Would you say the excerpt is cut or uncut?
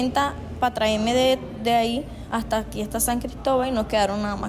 uncut